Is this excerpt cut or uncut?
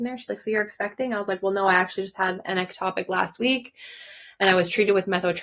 uncut